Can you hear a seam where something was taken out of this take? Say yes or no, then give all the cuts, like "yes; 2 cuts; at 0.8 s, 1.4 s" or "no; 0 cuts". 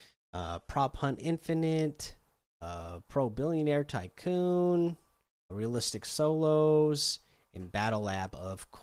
yes; 1 cut; at 5.5 s